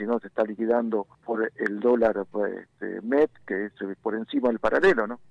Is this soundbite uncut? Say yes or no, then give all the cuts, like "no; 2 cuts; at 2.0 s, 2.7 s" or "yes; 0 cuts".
no; 1 cut; at 1.1 s